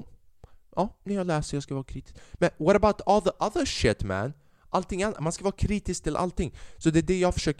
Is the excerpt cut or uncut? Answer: uncut